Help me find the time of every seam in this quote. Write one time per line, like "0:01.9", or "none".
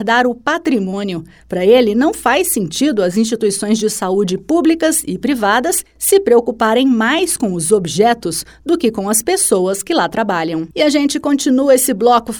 0:10.7